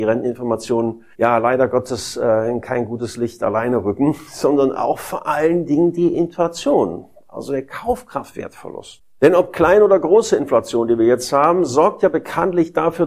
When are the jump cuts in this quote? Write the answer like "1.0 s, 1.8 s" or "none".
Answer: 1.1 s